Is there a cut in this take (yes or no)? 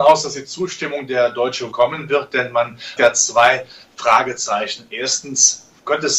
yes